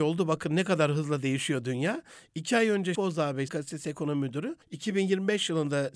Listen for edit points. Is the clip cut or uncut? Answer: cut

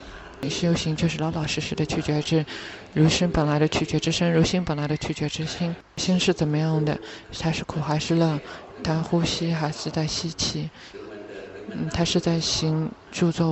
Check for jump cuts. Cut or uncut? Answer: cut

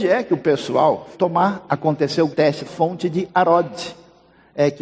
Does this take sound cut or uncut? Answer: cut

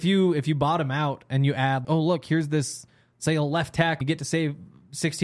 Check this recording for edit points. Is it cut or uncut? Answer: cut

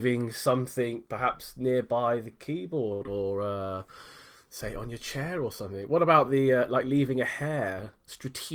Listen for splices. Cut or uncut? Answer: uncut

